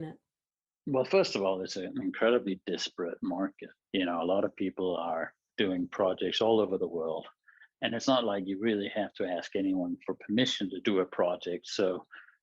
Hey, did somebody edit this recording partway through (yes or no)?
no